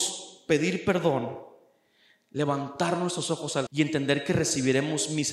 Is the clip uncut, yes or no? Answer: no